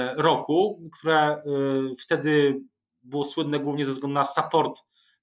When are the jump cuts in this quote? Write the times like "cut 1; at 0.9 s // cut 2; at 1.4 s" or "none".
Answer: none

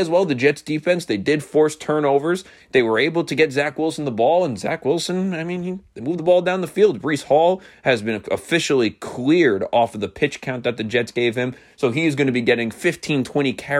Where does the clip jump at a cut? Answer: none

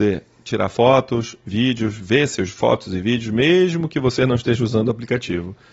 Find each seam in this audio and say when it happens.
none

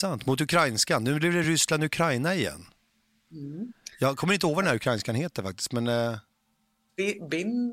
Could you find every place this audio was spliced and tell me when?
none

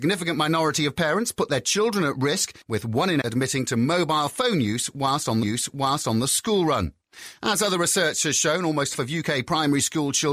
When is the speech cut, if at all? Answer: cut 1; at 2.6 s // cut 2; at 3.2 s // cut 3; at 5.4 s // cut 4; at 8.9 s

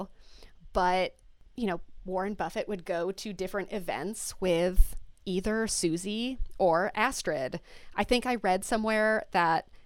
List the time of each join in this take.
none

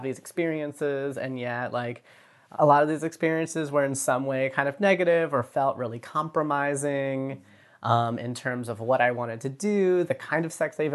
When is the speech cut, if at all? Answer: none

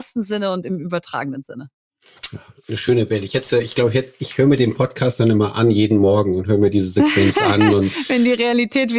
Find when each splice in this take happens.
none

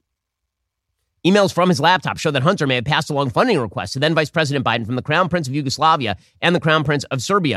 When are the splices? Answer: none

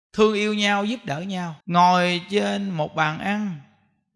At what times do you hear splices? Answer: cut 1; at 1.6 s

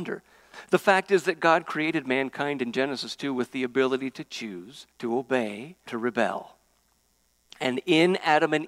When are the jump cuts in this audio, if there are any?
cut 1; at 4.9 s // cut 2; at 5.9 s

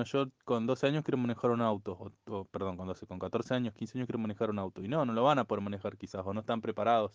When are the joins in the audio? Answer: none

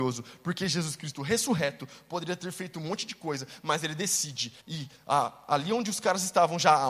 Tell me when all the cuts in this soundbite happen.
cut 1; at 4.6 s

